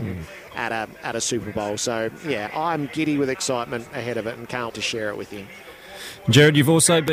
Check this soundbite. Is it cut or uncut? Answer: cut